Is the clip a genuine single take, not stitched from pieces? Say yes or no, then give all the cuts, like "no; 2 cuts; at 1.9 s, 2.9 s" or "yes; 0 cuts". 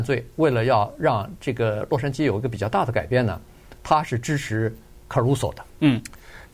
yes; 0 cuts